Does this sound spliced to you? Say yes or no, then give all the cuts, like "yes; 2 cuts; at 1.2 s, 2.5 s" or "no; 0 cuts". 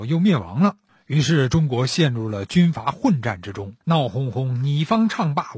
yes; 1 cut; at 3.8 s